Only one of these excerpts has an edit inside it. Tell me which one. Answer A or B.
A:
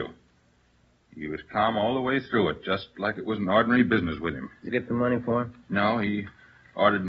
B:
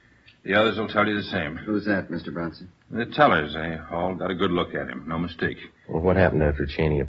A